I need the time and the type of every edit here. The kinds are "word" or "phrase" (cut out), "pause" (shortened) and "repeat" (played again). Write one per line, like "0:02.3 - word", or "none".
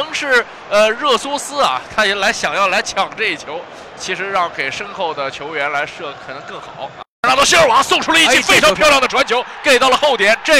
0:04.0 - word